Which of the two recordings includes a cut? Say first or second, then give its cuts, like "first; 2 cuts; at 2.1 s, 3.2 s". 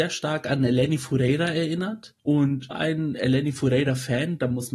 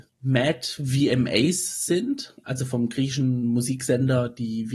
first; 1 cut; at 2.7 s